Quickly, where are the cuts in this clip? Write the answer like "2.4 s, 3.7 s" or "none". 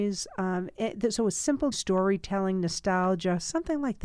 1.7 s